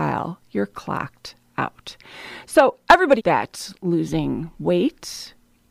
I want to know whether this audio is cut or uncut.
cut